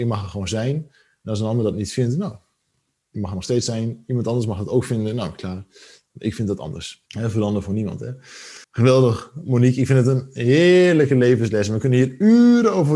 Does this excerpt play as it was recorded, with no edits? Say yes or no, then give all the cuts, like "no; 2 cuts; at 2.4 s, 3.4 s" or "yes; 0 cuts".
no; 2 cuts; at 7.1 s, 8.6 s